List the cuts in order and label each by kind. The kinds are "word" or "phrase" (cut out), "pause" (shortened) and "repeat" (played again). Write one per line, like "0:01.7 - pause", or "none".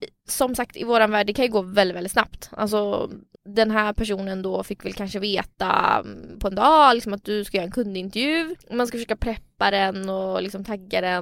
0:03.4 - pause
0:08.6 - pause